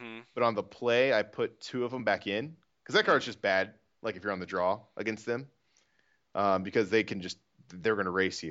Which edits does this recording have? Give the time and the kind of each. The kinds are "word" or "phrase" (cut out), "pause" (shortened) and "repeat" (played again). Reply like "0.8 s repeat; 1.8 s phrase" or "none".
none